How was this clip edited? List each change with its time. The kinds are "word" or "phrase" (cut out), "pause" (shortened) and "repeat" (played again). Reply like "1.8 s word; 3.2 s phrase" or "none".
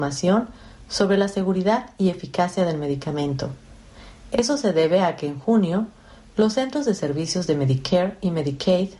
none